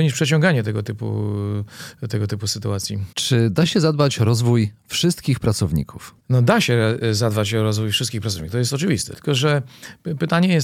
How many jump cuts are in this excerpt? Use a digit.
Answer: 2